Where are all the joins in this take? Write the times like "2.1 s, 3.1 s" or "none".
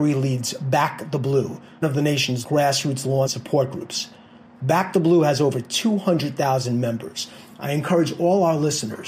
1.8 s, 2.4 s, 3.3 s